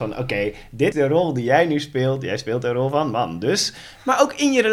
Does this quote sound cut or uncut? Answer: cut